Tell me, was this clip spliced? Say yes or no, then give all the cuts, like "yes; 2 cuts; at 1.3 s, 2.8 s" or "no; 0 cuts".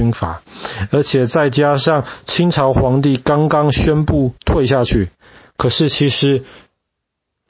yes; 1 cut; at 4.4 s